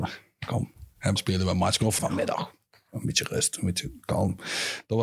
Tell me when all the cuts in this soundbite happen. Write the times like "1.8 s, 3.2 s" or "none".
1.2 s, 2.0 s